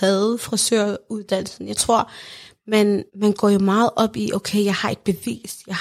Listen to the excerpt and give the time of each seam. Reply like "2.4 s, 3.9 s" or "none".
3.1 s